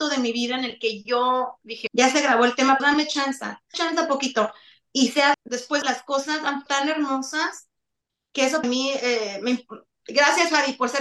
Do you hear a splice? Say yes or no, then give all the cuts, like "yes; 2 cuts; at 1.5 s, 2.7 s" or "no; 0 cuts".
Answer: yes; 7 cuts; at 1.9 s, 2.8 s, 3.7 s, 5.3 s, 5.8 s, 6.7 s, 8.6 s